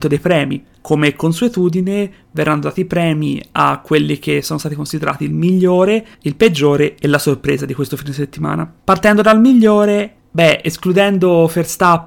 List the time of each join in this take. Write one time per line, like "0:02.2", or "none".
0:08.8